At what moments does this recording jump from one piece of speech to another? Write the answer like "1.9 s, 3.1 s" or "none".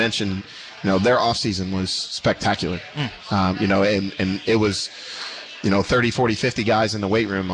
none